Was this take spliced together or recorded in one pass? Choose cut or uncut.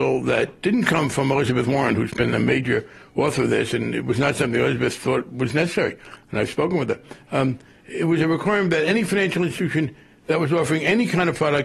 uncut